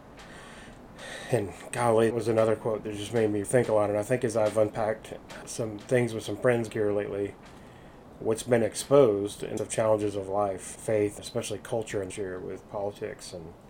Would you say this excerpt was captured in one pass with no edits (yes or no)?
no